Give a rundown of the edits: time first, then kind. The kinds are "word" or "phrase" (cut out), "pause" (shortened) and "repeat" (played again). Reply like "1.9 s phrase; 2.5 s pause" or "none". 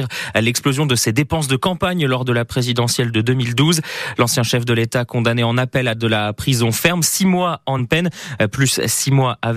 7.8 s word